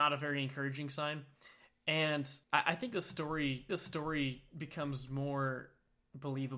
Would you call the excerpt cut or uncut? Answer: cut